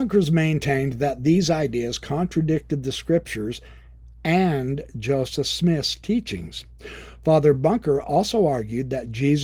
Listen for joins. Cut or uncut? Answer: uncut